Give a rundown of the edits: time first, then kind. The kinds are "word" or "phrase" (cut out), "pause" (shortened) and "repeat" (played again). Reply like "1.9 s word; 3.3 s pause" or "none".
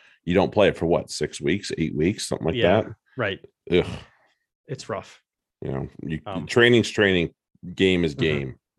none